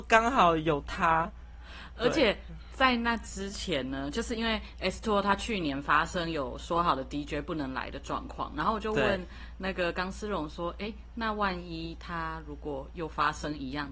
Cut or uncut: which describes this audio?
uncut